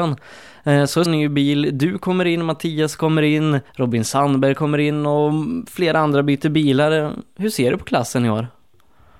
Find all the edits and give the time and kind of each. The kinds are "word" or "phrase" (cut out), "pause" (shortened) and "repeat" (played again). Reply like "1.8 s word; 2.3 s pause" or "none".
1.1 s phrase; 3.7 s pause